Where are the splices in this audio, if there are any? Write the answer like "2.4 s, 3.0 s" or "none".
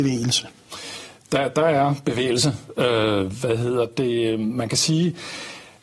none